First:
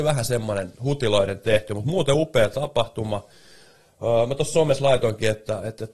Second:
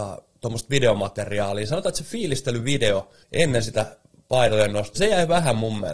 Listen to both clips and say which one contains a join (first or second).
second